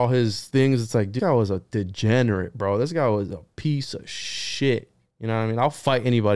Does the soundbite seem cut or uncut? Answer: cut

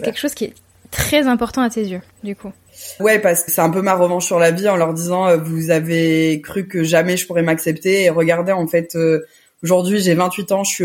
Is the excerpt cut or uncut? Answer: cut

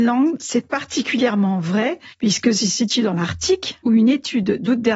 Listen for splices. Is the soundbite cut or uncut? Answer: cut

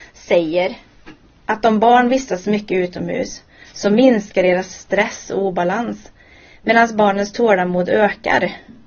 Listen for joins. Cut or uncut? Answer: uncut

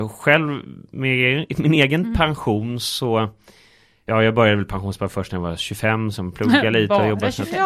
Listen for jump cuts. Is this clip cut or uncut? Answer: uncut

